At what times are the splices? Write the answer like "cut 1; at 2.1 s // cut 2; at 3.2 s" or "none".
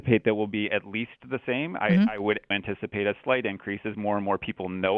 cut 1; at 2.5 s